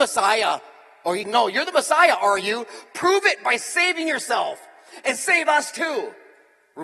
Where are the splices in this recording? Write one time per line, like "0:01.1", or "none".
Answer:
0:01.2